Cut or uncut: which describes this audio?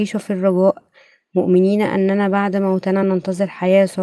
uncut